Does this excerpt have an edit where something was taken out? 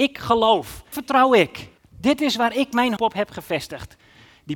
yes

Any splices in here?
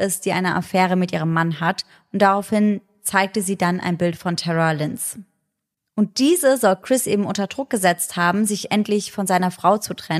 no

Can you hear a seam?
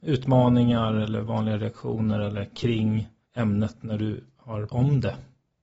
yes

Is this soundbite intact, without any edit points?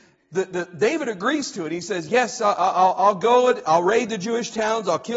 yes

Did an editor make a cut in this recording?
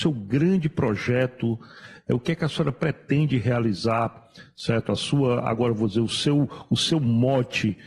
no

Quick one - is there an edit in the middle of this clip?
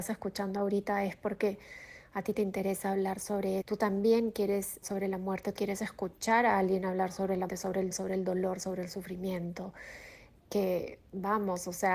yes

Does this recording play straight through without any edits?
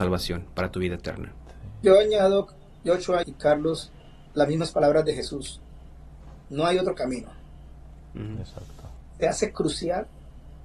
no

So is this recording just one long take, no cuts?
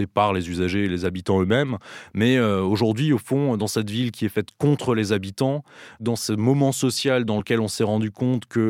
yes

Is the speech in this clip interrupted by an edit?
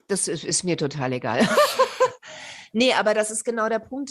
no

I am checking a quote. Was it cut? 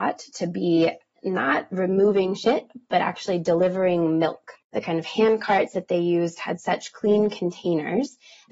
yes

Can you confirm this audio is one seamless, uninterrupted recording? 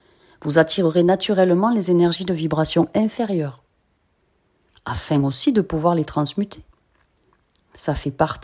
yes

